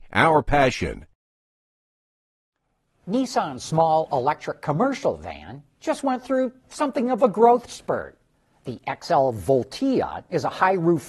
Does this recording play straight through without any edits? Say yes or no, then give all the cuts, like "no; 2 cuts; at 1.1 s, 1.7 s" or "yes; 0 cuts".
yes; 0 cuts